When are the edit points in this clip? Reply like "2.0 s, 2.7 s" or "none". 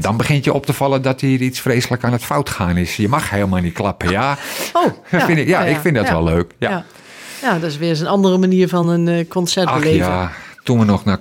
none